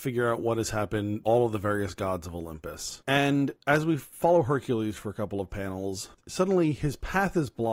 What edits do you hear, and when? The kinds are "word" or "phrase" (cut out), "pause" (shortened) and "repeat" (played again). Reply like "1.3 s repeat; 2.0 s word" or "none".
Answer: 1.2 s word